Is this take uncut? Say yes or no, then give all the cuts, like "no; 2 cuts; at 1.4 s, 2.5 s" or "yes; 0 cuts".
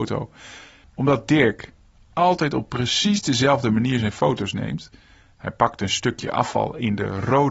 yes; 0 cuts